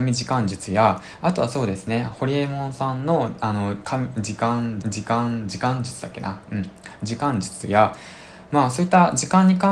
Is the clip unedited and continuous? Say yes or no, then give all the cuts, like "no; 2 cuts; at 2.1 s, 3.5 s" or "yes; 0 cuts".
no; 1 cut; at 4.8 s